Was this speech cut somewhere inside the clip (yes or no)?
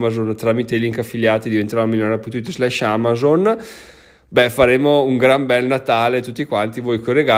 no